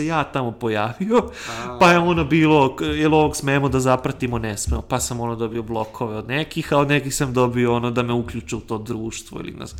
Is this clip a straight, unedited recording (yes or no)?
yes